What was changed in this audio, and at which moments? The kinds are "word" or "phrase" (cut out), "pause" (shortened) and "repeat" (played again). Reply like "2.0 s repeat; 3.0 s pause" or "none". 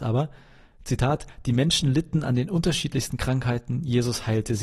none